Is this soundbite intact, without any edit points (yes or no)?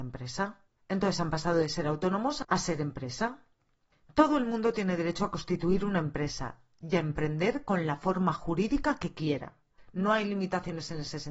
yes